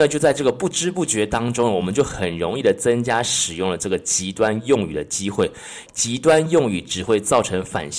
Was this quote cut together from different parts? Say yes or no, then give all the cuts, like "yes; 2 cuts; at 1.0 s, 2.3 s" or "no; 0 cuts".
yes; 1 cut; at 5.9 s